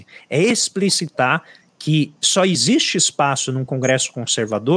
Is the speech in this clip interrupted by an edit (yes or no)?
no